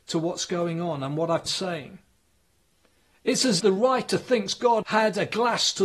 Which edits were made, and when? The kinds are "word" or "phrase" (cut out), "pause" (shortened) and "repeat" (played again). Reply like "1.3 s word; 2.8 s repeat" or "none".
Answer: 1.5 s word; 3.6 s word; 4.8 s word